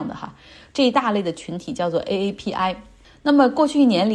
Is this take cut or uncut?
uncut